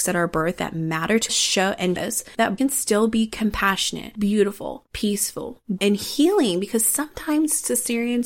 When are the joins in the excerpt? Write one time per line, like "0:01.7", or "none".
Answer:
0:01.3
0:02.0
0:02.6
0:05.8